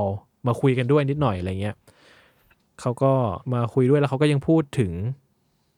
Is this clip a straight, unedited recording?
no; 1 cut; at 3.4 s

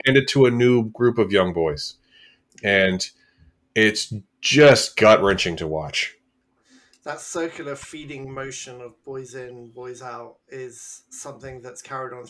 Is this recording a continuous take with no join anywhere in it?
yes; 0 cuts

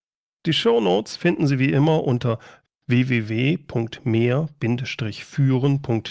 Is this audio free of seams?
yes; 0 cuts

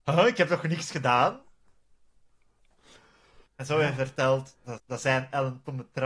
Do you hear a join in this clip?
yes; 2 cuts; at 3.5 s, 4.8 s

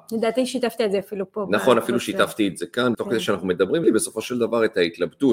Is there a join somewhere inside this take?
yes; 2 cuts; at 2.9 s, 3.8 s

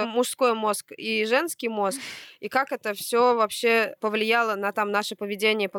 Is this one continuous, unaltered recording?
yes; 0 cuts

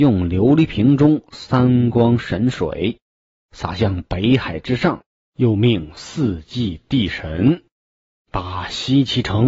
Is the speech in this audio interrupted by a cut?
no; 0 cuts

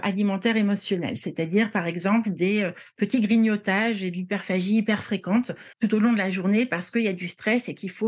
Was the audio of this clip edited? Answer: yes; 1 cut; at 5.7 s

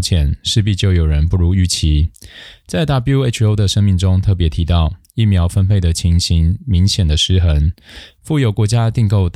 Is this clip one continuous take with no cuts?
yes; 0 cuts

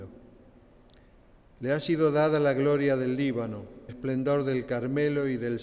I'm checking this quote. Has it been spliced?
yes; 1 cut; at 3.9 s

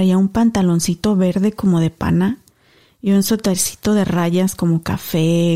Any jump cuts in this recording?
no; 0 cuts

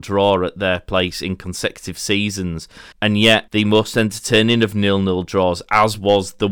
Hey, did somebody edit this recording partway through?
yes; 2 cuts; at 2.9 s, 3.5 s

